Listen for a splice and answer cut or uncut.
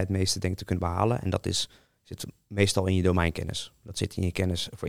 uncut